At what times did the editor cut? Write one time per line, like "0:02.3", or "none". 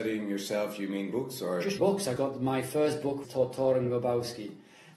0:01.1
0:01.8
0:02.2
0:03.2